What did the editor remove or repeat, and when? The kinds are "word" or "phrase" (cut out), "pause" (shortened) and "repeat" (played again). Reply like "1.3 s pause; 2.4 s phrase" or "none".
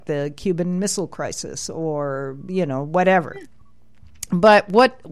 none